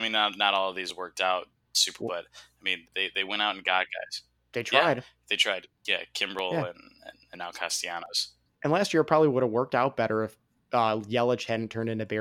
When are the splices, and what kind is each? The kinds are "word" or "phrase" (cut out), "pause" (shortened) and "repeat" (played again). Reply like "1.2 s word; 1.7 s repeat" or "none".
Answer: 2.0 s word; 2.8 s word